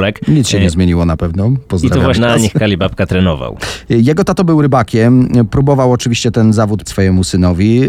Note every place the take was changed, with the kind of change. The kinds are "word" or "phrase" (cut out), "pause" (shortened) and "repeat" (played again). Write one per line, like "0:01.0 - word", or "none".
0:02.1 - word
0:06.8 - word